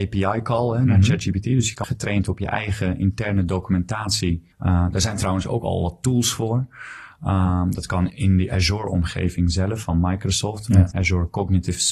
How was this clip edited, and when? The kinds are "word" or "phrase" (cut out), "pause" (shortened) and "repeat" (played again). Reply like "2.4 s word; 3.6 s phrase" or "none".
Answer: 1.8 s phrase; 4.5 s pause; 8.1 s word; 9.8 s word; 10.9 s word